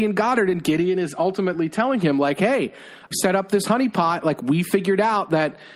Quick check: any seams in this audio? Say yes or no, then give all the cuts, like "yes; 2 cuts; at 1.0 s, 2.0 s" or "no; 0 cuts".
yes; 1 cut; at 3.1 s